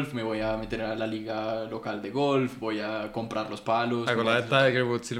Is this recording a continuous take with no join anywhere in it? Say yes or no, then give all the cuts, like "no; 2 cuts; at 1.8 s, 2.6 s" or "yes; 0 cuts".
yes; 0 cuts